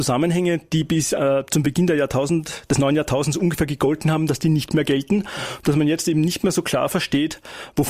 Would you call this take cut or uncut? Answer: uncut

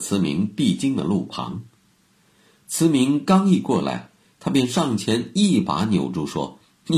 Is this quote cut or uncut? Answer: uncut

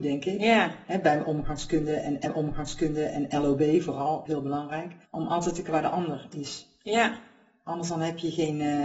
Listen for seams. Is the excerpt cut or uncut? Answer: cut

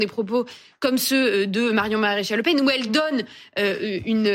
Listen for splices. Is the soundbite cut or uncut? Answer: uncut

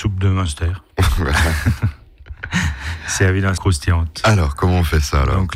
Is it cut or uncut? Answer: cut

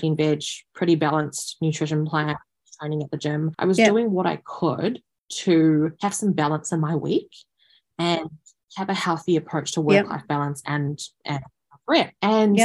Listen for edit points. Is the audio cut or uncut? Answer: uncut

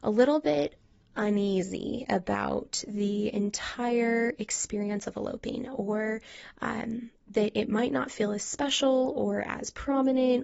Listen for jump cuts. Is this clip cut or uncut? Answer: uncut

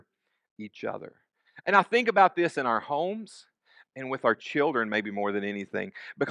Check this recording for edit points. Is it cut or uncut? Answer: uncut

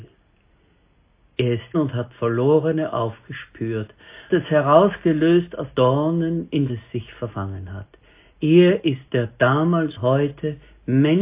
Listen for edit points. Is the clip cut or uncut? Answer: cut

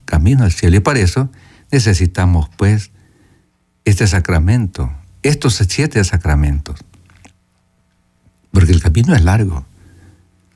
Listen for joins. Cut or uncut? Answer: uncut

